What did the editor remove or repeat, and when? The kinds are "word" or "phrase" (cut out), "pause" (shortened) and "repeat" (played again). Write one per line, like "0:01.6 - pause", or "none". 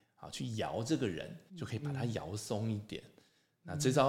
0:01.5 - pause